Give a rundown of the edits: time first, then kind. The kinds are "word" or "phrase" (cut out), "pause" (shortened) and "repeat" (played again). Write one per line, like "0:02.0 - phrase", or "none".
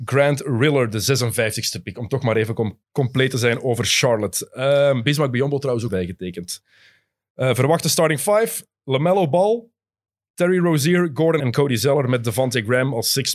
0:02.8 - pause
0:05.9 - phrase
0:11.4 - phrase